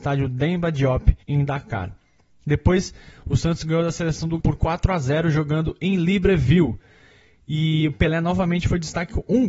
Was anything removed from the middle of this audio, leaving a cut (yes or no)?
yes